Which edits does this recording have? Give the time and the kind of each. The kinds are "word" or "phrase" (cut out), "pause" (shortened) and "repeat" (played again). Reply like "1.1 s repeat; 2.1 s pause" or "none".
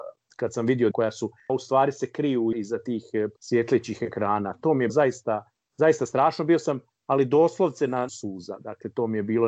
0.9 s word; 1.5 s word; 2.5 s word; 3.4 s pause; 4.9 s word; 8.1 s phrase